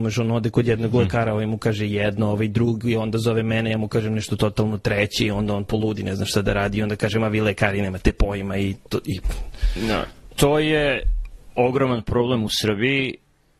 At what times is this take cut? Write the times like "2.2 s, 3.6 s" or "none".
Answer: none

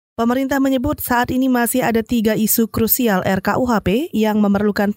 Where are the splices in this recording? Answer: none

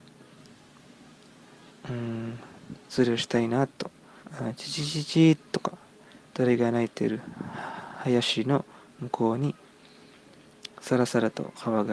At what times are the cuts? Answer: 4.2 s

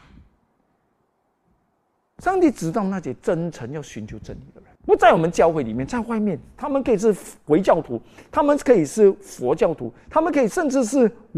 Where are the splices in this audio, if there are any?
4.8 s

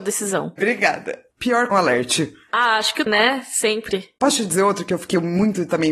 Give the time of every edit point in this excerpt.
1.7 s, 2.4 s, 3.1 s

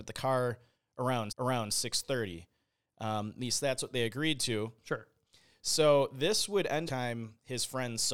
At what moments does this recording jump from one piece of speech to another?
1.3 s, 6.9 s

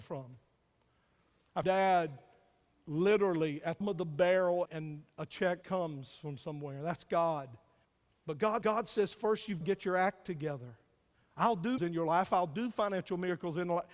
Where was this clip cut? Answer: 1.6 s, 3.8 s, 4.7 s, 5.6 s, 7.8 s, 8.6 s, 9.6 s, 11.8 s

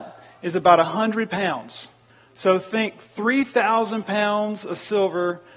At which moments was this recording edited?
2.1 s

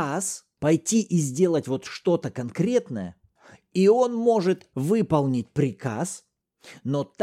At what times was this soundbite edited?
none

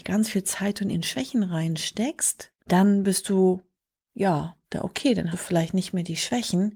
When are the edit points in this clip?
0.9 s, 2.6 s, 4.6 s, 5.3 s

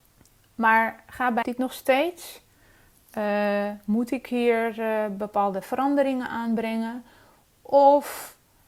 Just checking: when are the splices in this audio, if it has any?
1.4 s

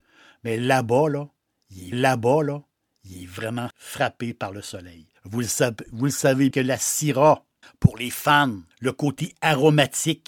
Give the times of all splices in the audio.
1.9 s, 3.7 s, 5.2 s, 6.5 s, 7.6 s, 8.7 s

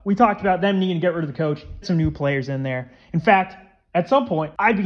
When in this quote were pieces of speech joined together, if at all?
1.8 s

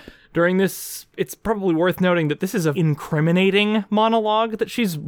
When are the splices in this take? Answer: 1.1 s, 2.7 s

